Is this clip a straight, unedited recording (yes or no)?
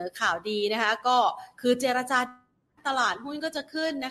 yes